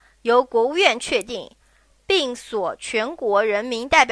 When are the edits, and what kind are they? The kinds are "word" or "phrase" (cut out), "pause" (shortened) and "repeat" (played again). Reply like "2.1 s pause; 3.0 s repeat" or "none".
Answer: none